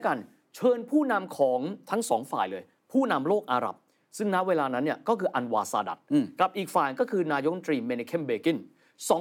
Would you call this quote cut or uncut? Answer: uncut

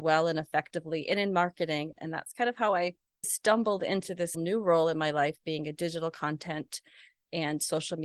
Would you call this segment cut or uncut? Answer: cut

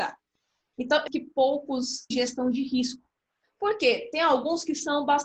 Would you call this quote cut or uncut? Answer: cut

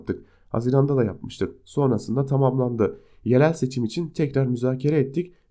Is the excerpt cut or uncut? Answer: uncut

